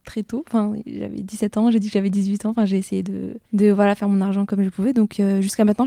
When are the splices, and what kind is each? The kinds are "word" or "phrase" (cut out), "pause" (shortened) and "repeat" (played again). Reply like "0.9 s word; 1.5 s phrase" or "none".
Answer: 3.5 s pause